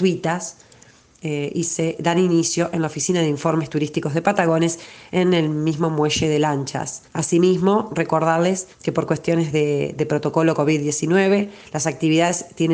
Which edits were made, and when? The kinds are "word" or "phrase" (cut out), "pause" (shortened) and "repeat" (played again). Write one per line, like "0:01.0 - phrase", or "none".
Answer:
0:07.1 - pause
0:08.7 - pause